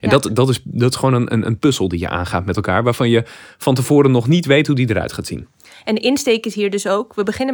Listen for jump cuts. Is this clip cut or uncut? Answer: uncut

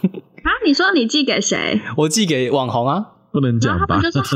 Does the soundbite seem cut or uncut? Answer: uncut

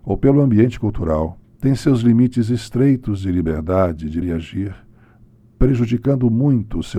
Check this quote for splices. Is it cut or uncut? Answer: cut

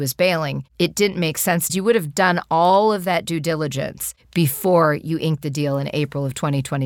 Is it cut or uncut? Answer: cut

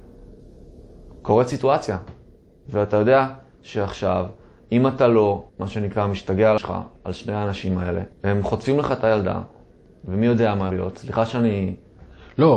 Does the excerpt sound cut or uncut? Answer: cut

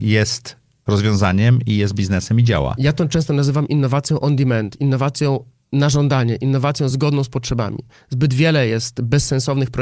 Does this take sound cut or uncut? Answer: uncut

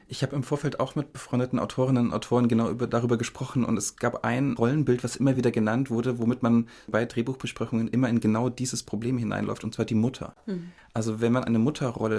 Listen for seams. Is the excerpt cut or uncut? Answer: uncut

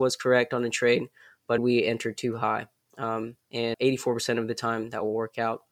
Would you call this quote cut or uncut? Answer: cut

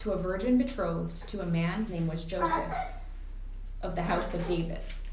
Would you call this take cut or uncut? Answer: cut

